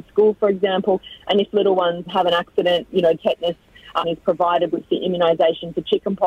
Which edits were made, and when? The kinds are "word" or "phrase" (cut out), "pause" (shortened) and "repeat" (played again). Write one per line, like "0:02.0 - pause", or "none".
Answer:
0:02.1 - word
0:03.2 - word
0:04.0 - word